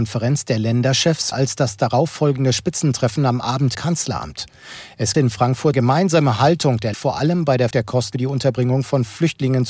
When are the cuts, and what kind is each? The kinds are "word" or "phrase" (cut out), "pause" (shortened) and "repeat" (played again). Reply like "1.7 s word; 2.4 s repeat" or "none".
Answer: 1.3 s word; 3.7 s word; 5.1 s word; 5.7 s word; 6.9 s word; 7.7 s word; 8.1 s word

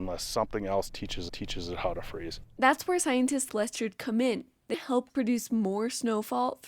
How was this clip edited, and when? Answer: 1.3 s repeat; 3.5 s word; 4.7 s word; 5.1 s word

